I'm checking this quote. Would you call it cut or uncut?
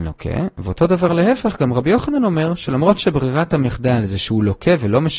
uncut